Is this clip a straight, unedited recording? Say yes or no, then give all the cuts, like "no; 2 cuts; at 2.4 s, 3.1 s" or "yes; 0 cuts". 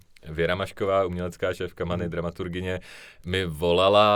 yes; 0 cuts